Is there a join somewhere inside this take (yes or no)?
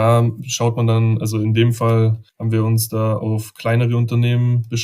yes